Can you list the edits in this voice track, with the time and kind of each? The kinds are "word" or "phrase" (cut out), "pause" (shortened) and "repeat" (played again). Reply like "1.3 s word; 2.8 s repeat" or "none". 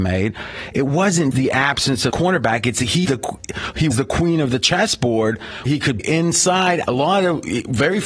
1.3 s word; 2.1 s word; 3.0 s word; 3.9 s word; 5.7 s word; 6.0 s word; 6.8 s word